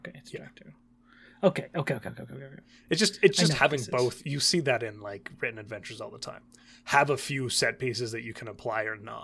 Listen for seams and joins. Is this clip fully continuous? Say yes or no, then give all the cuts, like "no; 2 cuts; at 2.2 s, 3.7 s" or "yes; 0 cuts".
yes; 0 cuts